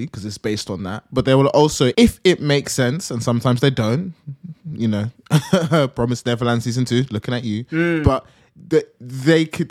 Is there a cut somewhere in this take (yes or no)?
yes